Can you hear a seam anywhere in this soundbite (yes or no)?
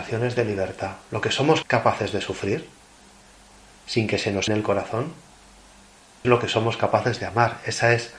yes